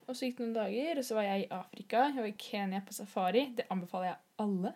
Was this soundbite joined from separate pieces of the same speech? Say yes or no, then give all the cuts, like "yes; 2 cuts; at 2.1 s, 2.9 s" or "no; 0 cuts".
no; 0 cuts